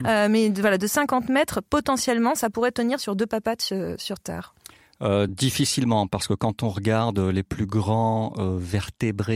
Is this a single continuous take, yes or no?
yes